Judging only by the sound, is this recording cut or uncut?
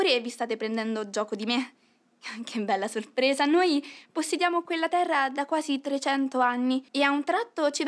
cut